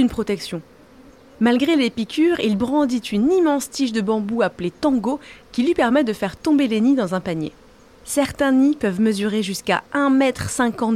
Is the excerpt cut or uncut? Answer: uncut